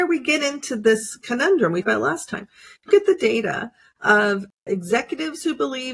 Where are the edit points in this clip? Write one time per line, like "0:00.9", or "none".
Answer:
0:01.8
0:02.9
0:04.7